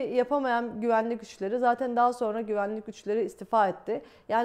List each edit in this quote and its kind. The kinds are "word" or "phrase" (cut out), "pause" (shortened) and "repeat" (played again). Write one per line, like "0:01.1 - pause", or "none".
none